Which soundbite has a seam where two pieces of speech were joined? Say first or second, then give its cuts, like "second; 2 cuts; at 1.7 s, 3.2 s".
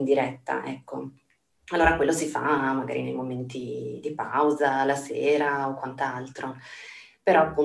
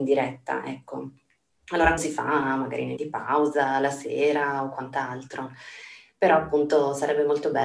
second; 2 cuts; at 2.0 s, 3.0 s